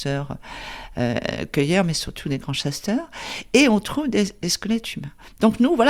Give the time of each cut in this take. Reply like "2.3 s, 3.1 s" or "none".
none